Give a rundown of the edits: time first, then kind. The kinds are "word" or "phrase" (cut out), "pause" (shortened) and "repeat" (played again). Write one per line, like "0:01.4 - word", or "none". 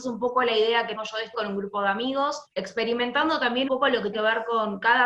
0:01.0 - word
0:01.3 - word
0:02.5 - pause
0:03.7 - word
0:04.1 - word